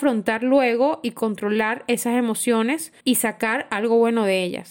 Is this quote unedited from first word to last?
no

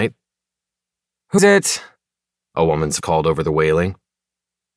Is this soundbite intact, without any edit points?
no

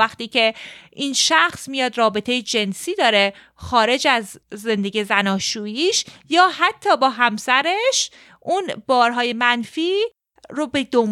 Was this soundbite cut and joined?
yes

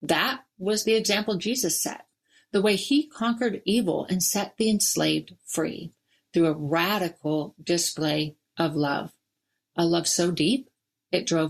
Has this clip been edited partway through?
no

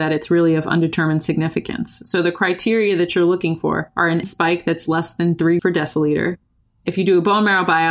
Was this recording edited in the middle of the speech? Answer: yes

